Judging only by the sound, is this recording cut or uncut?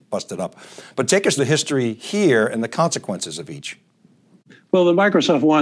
cut